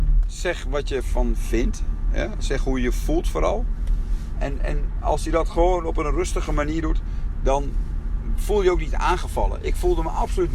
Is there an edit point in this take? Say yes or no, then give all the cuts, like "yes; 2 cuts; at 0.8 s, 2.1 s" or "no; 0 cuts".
no; 0 cuts